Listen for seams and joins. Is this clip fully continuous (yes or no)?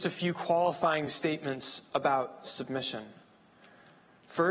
yes